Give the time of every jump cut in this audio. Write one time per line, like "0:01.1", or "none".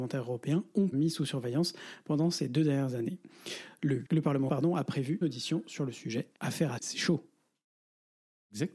0:00.9
0:04.0
0:04.5
0:05.2
0:06.3
0:06.8